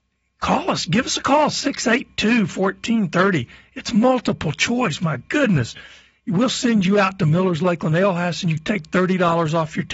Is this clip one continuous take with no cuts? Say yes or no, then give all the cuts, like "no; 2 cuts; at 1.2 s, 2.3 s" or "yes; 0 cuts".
yes; 0 cuts